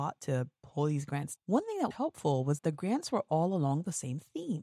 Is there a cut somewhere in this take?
yes; 3 cuts; at 1.4 s, 1.9 s, 2.6 s

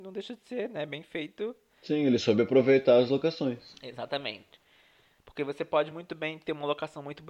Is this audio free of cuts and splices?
yes; 0 cuts

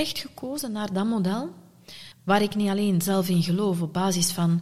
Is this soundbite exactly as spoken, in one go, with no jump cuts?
no; 1 cut; at 2.1 s

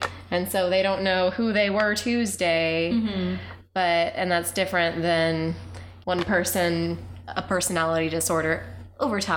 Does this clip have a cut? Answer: yes; 2 cuts; at 6.0 s, 7.2 s

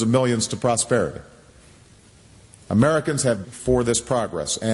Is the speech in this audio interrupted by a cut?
yes; 1 cut; at 3.4 s

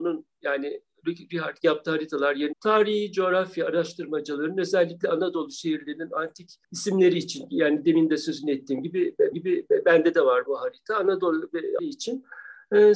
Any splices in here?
yes; 6 cuts; at 1.6 s, 2.5 s, 6.6 s, 9.3 s, 10.5 s, 11.8 s

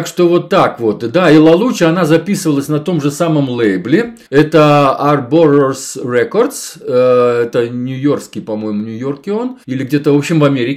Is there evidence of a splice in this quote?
yes; 2 cuts; at 4.3 s, 9.6 s

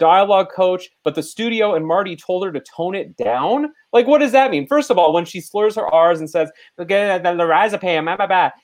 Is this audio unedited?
yes; 0 cuts

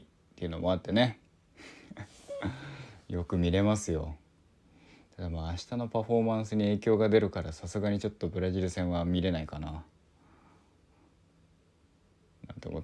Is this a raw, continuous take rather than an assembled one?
no; 1 cut; at 4.4 s

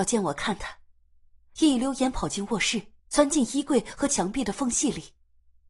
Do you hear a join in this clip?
yes; 1 cut; at 3.0 s

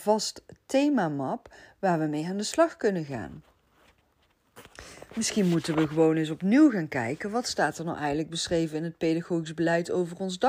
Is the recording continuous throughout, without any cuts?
yes; 0 cuts

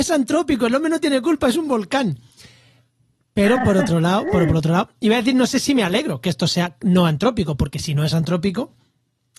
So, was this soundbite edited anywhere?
no; 0 cuts

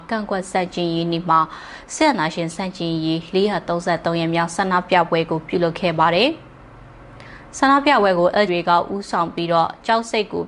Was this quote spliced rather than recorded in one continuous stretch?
yes; 1 cut; at 8.5 s

